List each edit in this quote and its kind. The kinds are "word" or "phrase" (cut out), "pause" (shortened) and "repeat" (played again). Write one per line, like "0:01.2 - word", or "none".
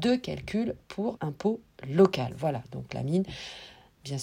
0:01.2 - word